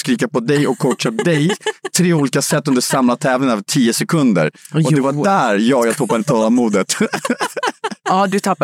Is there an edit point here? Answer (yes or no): no